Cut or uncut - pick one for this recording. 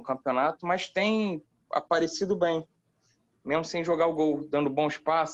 uncut